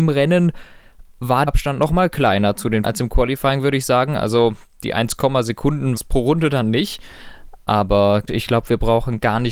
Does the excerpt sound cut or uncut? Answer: cut